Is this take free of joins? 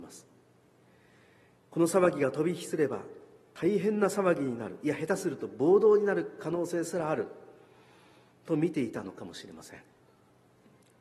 yes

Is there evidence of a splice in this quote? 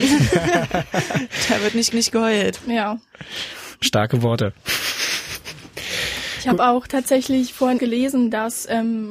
yes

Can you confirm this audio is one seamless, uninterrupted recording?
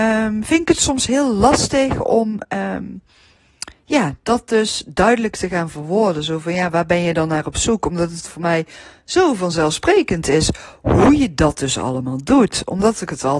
yes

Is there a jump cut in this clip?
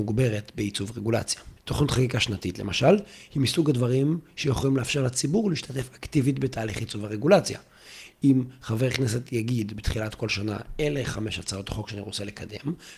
yes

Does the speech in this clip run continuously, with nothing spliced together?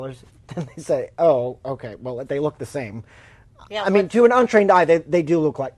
yes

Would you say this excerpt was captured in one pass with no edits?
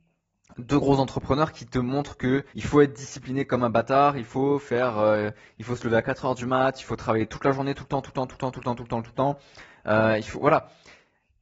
no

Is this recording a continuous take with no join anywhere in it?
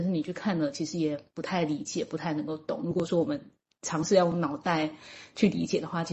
yes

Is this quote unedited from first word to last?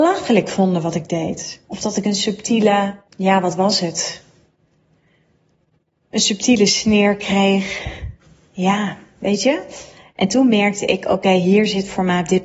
no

